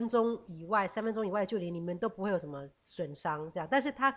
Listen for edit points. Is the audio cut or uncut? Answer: cut